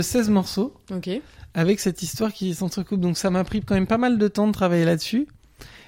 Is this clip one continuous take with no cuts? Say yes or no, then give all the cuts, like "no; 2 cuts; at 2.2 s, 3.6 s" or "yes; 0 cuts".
yes; 0 cuts